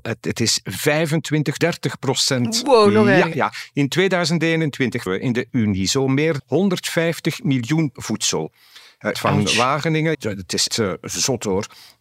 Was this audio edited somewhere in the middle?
yes; 9 cuts; at 1.6 s, 3.3 s, 5.1 s, 5.5 s, 6.4 s, 7.9 s, 9.1 s, 10.1 s, 10.7 s

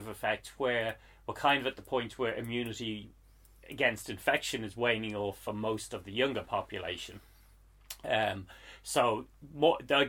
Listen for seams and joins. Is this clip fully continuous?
yes; 0 cuts

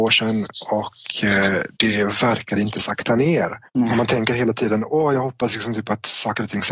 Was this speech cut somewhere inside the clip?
yes; 2 cuts; at 1.7 s, 3.7 s

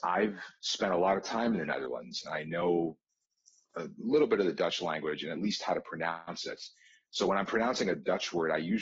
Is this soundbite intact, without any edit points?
yes; 0 cuts

